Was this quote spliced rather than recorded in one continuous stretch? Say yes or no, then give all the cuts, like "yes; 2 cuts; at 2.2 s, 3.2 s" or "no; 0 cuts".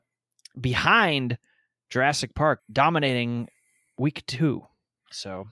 yes; 1 cut; at 2.6 s